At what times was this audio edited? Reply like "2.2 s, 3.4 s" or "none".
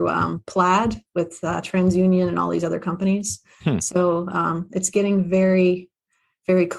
none